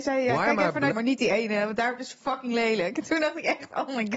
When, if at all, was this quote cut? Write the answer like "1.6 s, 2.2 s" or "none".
0.9 s